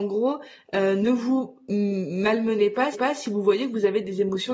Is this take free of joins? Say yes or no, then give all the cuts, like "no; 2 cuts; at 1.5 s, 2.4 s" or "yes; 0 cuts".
no; 1 cut; at 2.9 s